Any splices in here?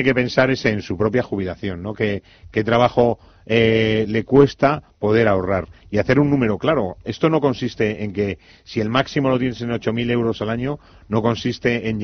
no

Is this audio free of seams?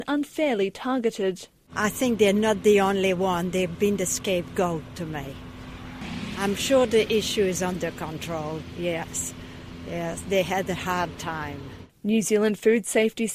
yes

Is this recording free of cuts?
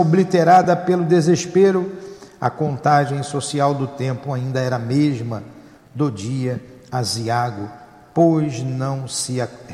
yes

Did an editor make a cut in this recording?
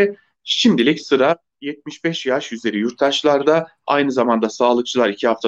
no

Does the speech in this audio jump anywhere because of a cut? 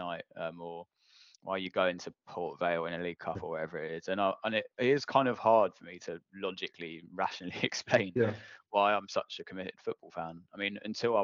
no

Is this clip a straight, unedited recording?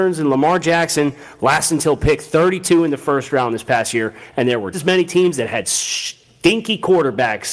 no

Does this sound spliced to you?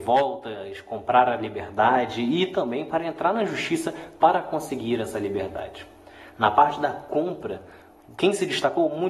no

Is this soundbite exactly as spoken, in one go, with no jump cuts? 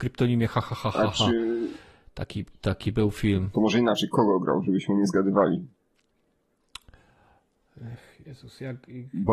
yes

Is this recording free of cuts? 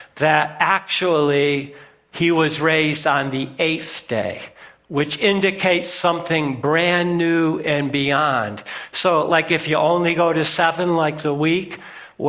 yes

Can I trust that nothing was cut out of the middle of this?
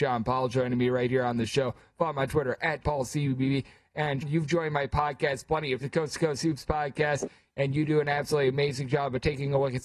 no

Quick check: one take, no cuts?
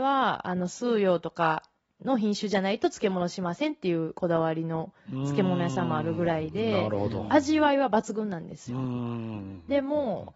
yes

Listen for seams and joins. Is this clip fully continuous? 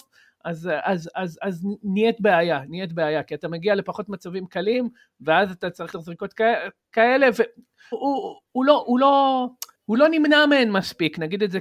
no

